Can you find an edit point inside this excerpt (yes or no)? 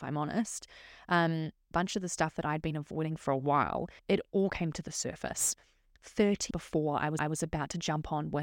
yes